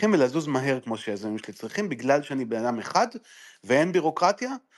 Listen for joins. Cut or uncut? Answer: uncut